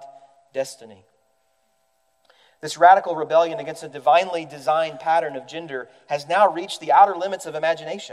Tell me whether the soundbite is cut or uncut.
uncut